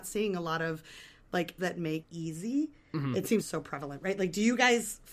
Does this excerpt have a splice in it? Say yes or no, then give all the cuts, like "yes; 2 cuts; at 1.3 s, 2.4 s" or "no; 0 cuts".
yes; 3 cuts; at 1.6 s, 2.0 s, 3.4 s